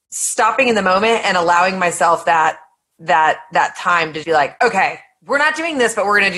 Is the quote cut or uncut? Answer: cut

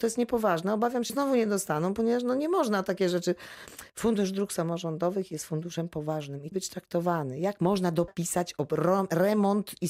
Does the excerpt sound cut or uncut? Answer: cut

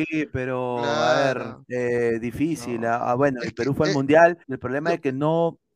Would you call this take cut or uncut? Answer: cut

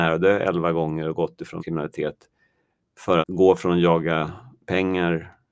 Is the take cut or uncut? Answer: cut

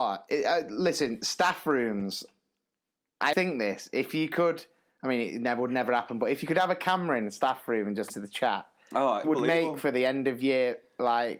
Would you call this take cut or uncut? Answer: cut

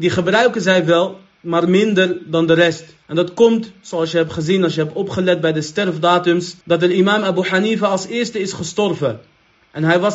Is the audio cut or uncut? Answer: cut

